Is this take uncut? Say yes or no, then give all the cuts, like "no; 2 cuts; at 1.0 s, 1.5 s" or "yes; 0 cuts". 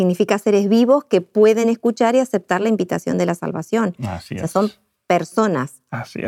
yes; 0 cuts